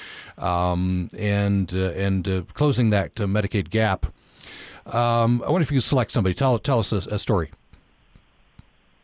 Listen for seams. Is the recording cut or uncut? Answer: uncut